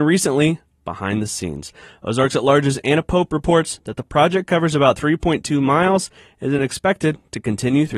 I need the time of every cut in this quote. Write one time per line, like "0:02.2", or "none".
none